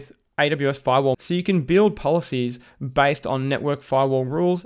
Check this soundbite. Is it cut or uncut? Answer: cut